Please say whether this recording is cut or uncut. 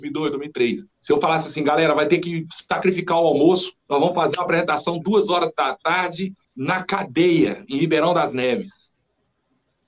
cut